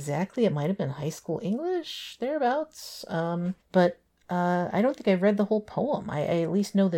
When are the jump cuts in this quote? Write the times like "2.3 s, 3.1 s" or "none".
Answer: 3.6 s